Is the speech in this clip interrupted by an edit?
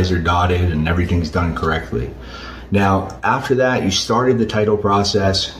no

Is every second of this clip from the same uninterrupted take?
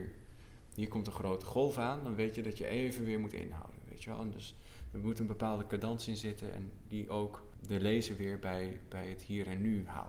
yes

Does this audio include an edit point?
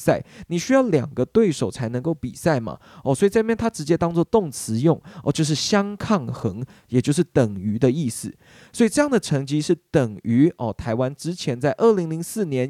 no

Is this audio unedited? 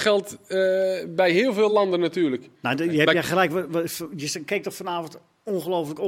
yes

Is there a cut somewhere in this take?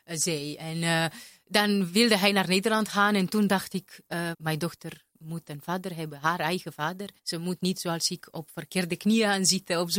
yes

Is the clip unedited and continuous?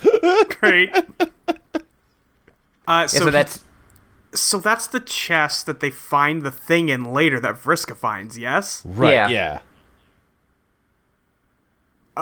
no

